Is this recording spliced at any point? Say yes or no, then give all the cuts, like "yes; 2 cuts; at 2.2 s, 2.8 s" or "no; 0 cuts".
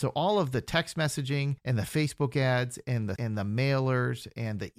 yes; 2 cuts; at 1.6 s, 3.2 s